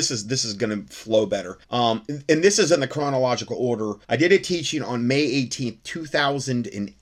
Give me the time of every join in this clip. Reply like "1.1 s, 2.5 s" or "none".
1.6 s, 4.0 s